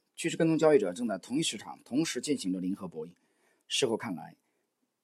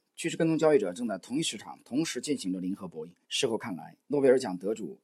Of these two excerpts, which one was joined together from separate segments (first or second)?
second